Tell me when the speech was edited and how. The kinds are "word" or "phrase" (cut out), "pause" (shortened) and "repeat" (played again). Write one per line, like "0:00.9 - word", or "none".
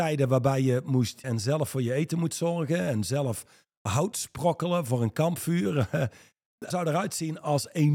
0:01.2 - word
0:04.1 - word
0:06.7 - word